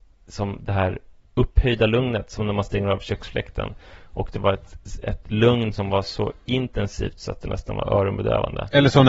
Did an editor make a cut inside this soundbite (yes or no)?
no